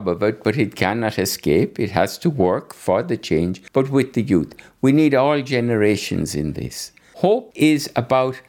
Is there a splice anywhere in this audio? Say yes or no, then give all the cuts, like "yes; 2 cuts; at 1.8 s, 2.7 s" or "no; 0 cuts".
yes; 1 cut; at 3.7 s